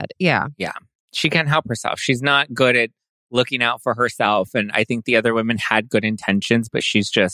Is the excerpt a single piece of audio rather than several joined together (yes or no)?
yes